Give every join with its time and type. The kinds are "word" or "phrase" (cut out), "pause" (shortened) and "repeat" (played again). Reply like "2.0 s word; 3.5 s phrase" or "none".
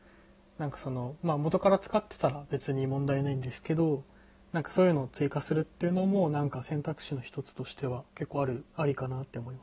none